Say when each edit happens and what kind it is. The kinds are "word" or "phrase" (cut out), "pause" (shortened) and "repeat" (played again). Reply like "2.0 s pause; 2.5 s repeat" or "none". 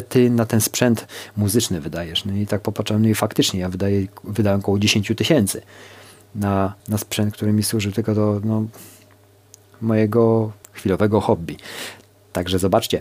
6.8 s pause; 10.6 s pause